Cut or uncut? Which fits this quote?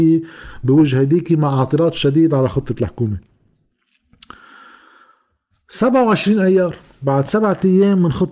uncut